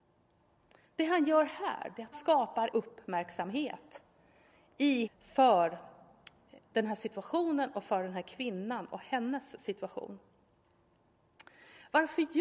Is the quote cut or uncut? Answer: cut